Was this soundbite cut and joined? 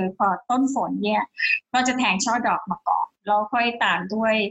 yes; 1 cut; at 3.1 s

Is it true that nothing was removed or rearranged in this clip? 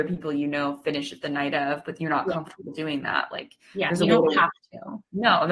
yes; 0 cuts

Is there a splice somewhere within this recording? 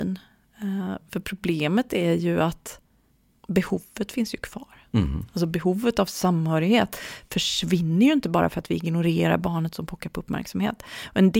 no; 0 cuts

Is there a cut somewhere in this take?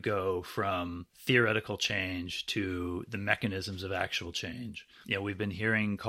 yes; 1 cut; at 1.1 s

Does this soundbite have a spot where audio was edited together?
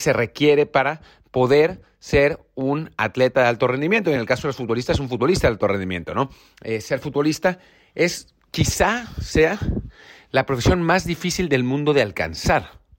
no; 0 cuts

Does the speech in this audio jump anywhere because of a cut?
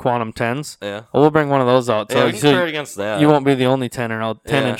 no; 0 cuts

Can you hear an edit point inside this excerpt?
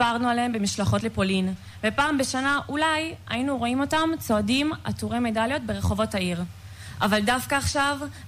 no; 0 cuts

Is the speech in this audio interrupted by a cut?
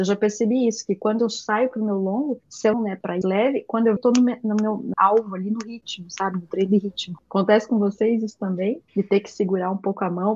yes; 4 cuts; at 2.7 s, 3.2 s, 4.0 s, 4.9 s

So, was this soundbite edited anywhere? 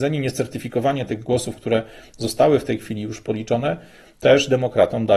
no; 0 cuts

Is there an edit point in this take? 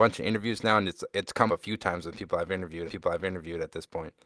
yes; 2 cuts; at 1.5 s, 2.9 s

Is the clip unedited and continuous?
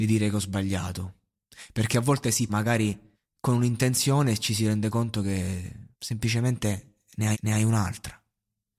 no; 4 cuts; at 2.5 s, 3.1 s, 5.9 s, 7.3 s

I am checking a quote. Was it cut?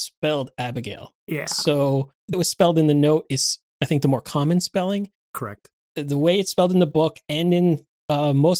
yes; 2 cuts; at 1.2 s, 2.3 s

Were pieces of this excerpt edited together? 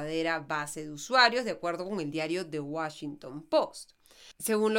no; 0 cuts

